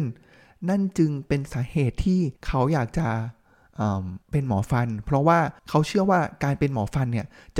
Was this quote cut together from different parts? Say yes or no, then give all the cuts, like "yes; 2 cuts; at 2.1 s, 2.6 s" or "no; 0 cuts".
yes; 3 cuts; at 2.4 s, 4.2 s, 5.6 s